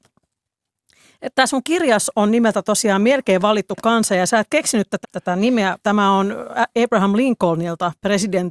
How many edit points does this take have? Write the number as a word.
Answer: three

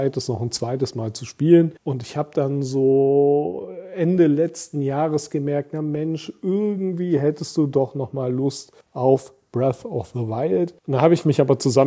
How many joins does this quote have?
three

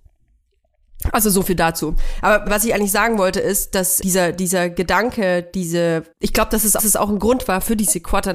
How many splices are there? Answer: four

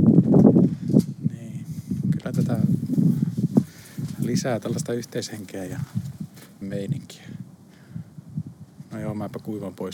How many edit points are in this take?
two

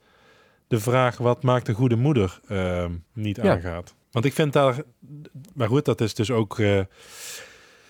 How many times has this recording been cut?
two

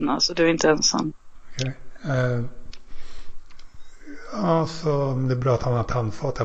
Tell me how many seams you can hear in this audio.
zero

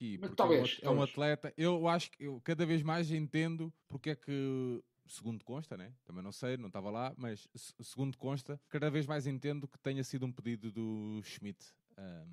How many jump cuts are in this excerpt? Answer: two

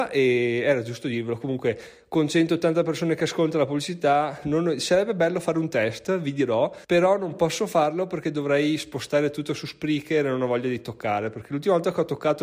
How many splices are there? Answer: one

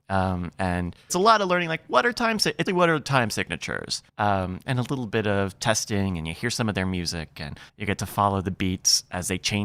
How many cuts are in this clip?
four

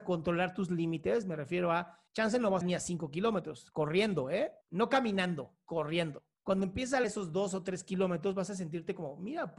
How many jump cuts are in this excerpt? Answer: five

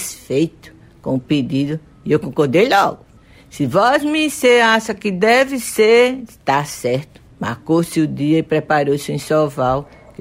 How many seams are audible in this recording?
two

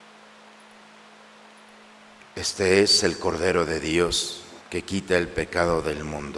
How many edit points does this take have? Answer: one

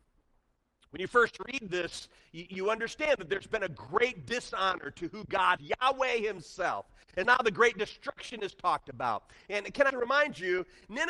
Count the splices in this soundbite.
four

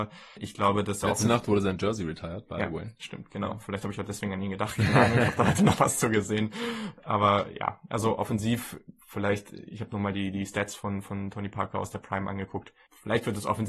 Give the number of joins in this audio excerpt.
zero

